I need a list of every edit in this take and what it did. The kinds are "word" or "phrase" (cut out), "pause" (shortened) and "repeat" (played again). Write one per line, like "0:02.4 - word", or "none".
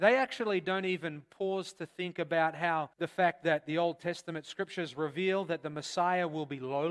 0:02.9 - pause

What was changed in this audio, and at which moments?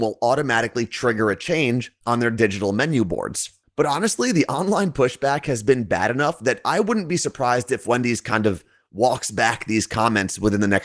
none

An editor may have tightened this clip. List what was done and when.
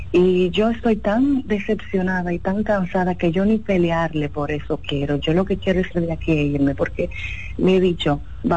0:05.9 - word

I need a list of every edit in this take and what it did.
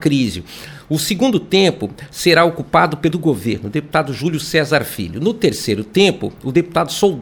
0:03.1 - word

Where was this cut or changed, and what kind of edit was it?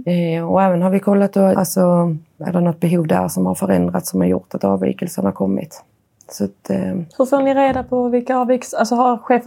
0:01.5 - phrase
0:07.1 - pause

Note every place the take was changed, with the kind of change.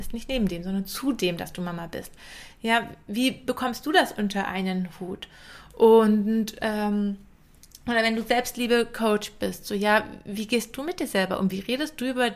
none

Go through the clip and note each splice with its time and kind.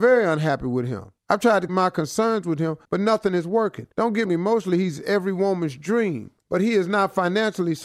0:01.2 - pause
0:01.7 - word
0:02.8 - pause
0:03.9 - pause
0:04.2 - phrase
0:06.4 - pause

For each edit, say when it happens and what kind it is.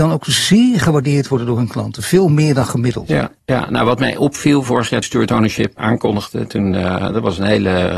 0:03.4 - pause
0:05.0 - phrase
0:05.8 - word

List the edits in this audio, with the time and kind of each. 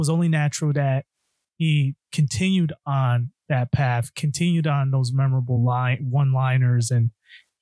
none

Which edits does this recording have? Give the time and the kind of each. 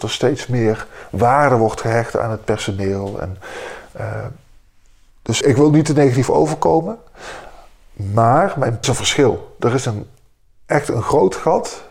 0:05.4 - word
0:08.8 - phrase

